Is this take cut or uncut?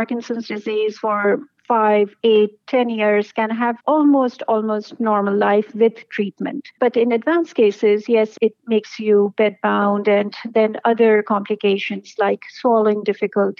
cut